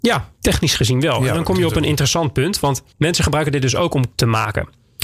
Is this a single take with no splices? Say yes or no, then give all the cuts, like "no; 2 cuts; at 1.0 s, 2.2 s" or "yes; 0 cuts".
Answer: no; 2 cuts; at 2.9 s, 4.1 s